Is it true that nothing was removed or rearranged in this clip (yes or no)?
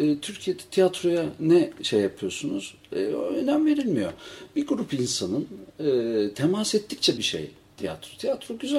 no